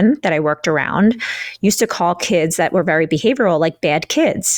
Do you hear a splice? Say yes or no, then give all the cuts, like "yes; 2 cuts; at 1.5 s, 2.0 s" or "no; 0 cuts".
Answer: no; 0 cuts